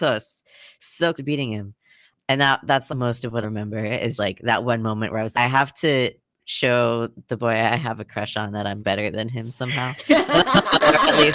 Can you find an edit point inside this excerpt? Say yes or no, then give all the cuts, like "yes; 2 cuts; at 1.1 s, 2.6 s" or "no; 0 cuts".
yes; 7 cuts; at 1.1 s, 2.9 s, 3.4 s, 4.2 s, 5.3 s, 8.8 s, 10.1 s